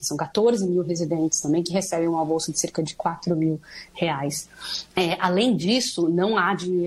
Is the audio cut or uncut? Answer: cut